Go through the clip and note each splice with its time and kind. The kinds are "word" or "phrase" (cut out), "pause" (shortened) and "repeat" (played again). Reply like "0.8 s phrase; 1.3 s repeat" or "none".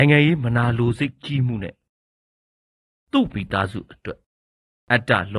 none